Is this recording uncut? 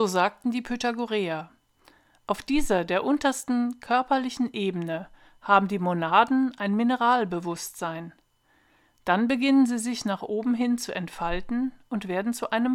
yes; 0 cuts

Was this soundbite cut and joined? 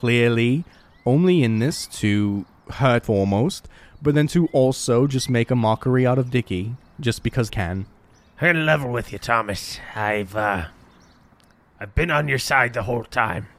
yes; 2 cuts; at 3.0 s, 7.5 s

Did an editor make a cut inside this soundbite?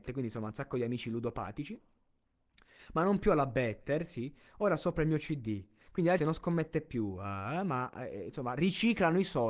yes; 1 cut; at 6.2 s

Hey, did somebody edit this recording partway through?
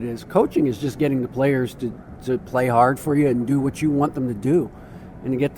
no; 0 cuts

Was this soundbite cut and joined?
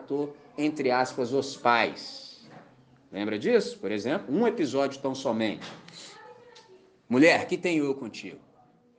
no; 0 cuts

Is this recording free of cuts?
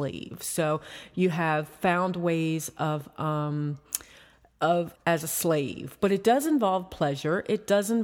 no; 1 cut; at 4.9 s

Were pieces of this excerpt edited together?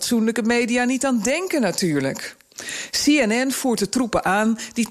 no; 0 cuts

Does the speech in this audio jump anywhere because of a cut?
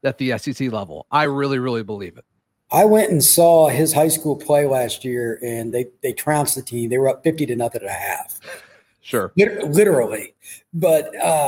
no; 0 cuts

